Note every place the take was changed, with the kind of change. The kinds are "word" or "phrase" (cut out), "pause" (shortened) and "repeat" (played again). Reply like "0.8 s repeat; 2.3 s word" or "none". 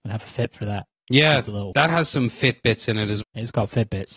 0.9 s word; 1.7 s word; 3.2 s word